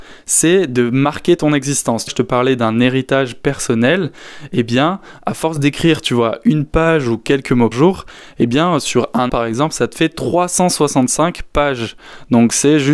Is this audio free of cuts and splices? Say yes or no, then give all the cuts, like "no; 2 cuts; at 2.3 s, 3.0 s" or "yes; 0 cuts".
no; 3 cuts; at 2.1 s, 7.7 s, 9.3 s